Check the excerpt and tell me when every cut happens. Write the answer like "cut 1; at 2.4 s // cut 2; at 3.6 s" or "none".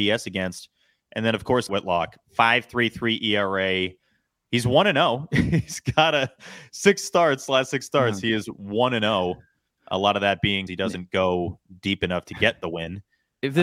cut 1; at 1.7 s // cut 2; at 10.7 s